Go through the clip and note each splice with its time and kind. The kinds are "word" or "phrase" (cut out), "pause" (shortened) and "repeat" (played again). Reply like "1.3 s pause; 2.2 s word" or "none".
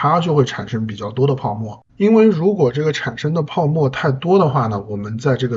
1.9 s pause